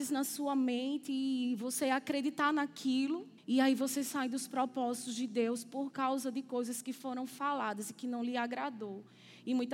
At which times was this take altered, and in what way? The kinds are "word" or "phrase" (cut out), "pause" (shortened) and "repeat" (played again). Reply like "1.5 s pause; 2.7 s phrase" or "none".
3.4 s pause